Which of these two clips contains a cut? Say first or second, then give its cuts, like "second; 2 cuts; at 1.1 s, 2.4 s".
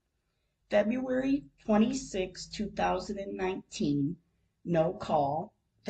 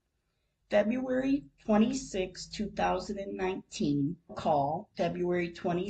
second; 2 cuts; at 4.3 s, 4.9 s